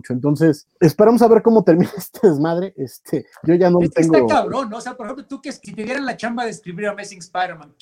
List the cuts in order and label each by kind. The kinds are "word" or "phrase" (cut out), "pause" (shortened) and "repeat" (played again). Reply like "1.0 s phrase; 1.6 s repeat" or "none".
none